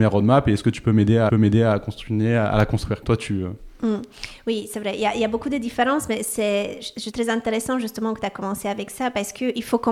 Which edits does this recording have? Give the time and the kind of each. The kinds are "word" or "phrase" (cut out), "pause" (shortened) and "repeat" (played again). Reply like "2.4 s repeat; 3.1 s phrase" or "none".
1.3 s repeat; 3.0 s word; 7.1 s word